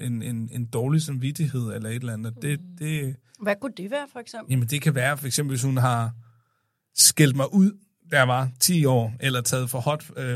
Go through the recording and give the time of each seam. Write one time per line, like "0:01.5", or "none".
none